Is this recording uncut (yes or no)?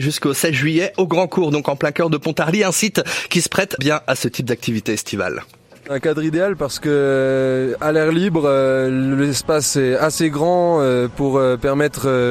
no